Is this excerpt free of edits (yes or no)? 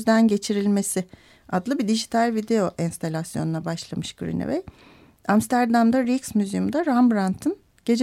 yes